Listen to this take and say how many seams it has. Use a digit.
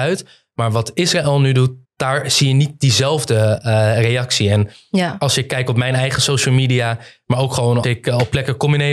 2